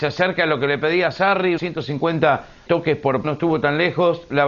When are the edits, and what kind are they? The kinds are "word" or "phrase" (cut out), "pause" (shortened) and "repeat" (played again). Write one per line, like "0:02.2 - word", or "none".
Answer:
0:01.6 - word
0:02.7 - word
0:03.2 - word